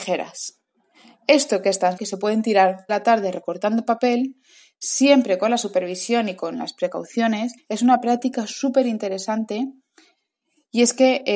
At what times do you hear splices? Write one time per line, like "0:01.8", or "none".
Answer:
0:02.0
0:02.9
0:07.6